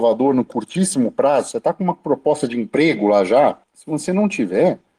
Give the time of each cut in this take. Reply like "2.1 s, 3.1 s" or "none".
3.6 s